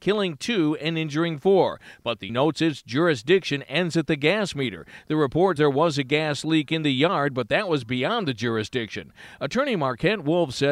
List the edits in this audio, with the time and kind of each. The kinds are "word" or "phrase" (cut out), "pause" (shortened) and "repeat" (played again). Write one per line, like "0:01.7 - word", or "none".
0:02.3 - word
0:05.6 - word